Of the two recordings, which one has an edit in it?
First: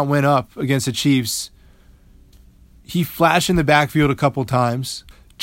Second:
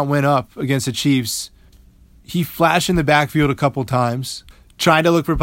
second; 1 cut; at 1.7 s

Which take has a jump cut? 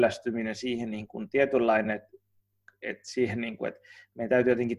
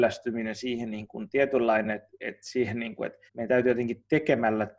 second; 2 cuts; at 2.1 s, 3.3 s

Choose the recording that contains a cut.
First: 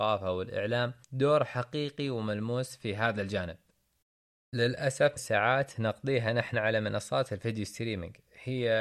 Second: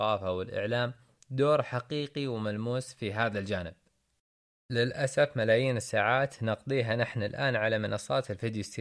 first; 3 cuts; at 1.0 s, 5.2 s, 6.5 s

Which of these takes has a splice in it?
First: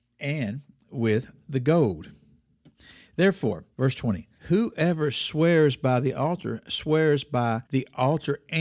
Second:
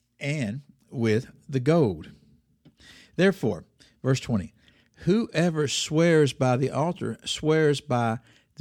first; 3 cuts; at 3.7 s, 4.4 s, 7.7 s

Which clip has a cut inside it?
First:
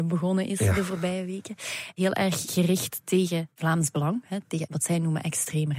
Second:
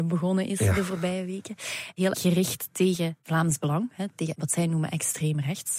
second; 1 cut; at 2.1 s

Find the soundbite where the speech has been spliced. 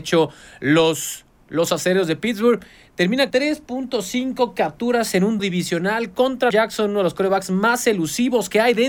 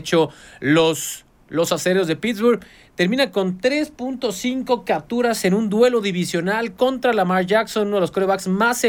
first; 3 cuts; at 3.3 s, 5.4 s, 6.5 s

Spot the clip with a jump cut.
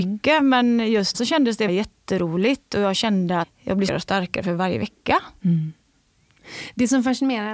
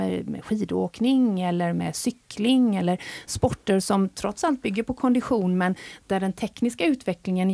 first; 4 cuts; at 1.1 s, 1.7 s, 3.4 s, 3.9 s

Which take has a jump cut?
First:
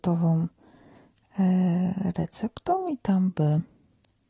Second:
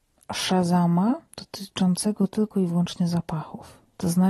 second; 1 cut; at 1.3 s

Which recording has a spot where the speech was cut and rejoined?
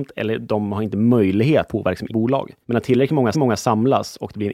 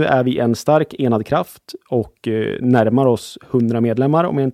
first; 4 cuts; at 1.7 s, 2.1 s, 2.6 s, 3.3 s

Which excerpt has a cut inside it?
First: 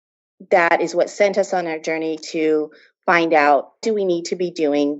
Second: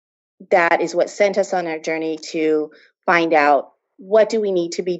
first; 1 cut; at 3.8 s

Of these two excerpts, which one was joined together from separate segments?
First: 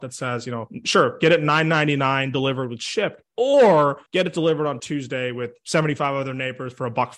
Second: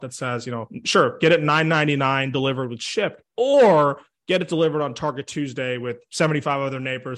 first; 2 cuts; at 4.1 s, 4.8 s

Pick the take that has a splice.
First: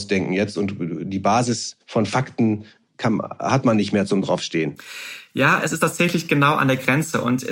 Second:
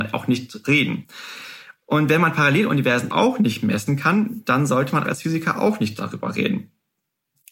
second; 2 cuts; at 3.1 s, 5.0 s

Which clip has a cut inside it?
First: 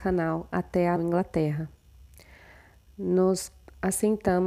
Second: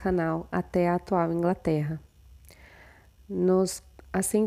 first; 1 cut; at 1.0 s

